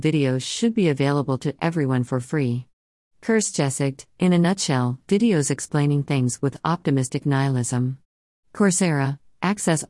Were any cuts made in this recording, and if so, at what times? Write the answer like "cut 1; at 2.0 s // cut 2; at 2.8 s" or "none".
none